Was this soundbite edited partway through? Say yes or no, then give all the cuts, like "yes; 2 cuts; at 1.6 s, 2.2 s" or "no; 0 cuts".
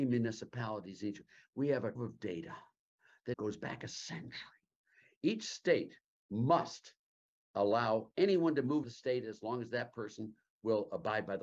yes; 3 cuts; at 2.0 s, 3.3 s, 8.8 s